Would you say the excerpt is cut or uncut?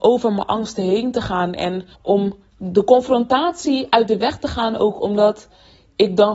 cut